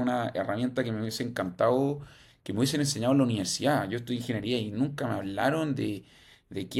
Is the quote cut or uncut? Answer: uncut